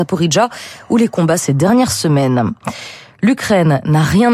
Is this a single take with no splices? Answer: no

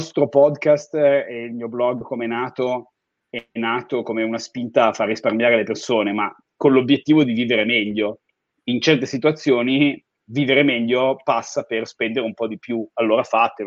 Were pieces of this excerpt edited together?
no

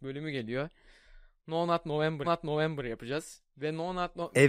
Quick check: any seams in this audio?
yes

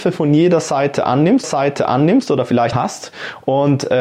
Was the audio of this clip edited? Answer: yes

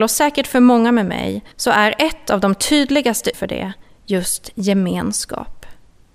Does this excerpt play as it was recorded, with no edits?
no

